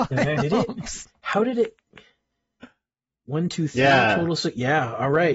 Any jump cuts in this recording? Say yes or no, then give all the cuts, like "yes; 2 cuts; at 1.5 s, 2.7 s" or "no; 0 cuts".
no; 0 cuts